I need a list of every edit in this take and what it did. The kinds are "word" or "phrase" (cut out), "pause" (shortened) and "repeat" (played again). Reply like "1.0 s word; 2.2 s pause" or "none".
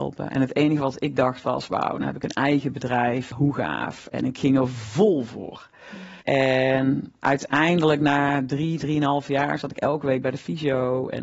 3.3 s word; 6.2 s pause; 7.2 s pause